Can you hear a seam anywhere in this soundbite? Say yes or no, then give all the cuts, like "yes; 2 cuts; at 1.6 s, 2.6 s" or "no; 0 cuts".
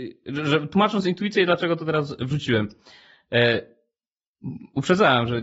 no; 0 cuts